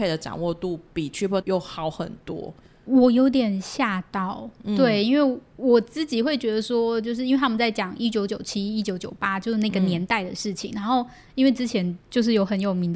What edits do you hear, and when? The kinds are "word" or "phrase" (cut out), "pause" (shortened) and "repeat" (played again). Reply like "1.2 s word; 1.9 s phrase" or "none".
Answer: 1.4 s word